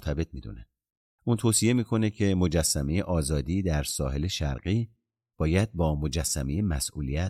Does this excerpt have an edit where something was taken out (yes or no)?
no